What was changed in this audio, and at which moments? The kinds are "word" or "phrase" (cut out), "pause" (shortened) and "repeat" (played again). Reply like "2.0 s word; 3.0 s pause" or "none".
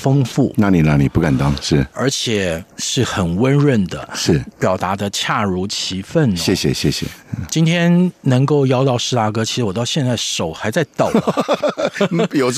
2.7 s pause; 4.5 s pause